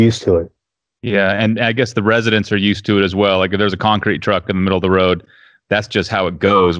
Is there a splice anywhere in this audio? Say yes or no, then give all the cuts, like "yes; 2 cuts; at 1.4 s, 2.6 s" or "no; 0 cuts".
no; 0 cuts